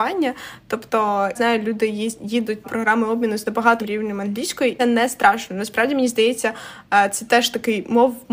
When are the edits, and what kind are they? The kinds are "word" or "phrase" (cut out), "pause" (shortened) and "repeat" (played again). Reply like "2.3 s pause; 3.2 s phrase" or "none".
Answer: 1.4 s word; 2.6 s word; 3.8 s word; 4.8 s word